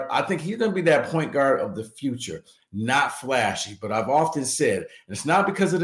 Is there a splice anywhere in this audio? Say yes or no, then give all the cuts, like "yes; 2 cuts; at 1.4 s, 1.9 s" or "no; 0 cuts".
no; 0 cuts